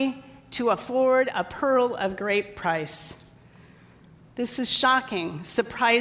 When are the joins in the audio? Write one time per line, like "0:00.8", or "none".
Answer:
none